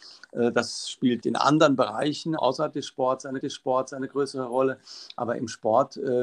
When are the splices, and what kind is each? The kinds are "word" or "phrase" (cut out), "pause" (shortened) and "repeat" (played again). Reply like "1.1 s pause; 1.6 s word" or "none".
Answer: 1.2 s word; 2.4 s word; 3.4 s repeat